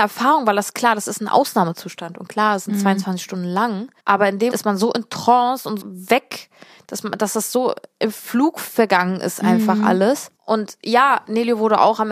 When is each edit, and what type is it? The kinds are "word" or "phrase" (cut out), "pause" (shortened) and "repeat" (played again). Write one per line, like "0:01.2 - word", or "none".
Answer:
0:04.0 - pause
0:04.5 - word
0:05.8 - word
0:10.4 - pause